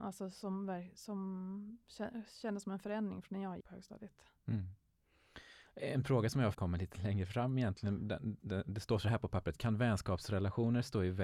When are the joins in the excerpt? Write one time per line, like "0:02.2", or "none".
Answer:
0:03.6
0:06.5
0:08.4